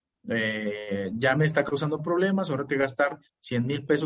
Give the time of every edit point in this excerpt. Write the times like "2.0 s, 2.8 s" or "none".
2.7 s